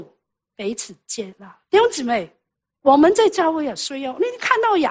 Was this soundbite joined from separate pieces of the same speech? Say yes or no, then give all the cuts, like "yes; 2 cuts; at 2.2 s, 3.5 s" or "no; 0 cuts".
yes; 1 cut; at 1.6 s